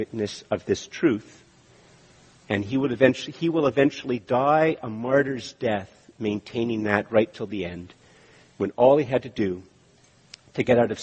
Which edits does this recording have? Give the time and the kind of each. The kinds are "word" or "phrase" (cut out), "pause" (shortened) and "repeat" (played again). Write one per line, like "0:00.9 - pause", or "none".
none